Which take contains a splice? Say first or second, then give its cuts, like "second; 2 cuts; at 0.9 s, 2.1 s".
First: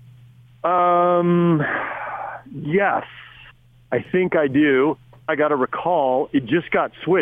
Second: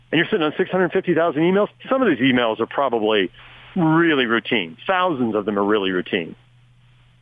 first; 2 cuts; at 3.5 s, 5.3 s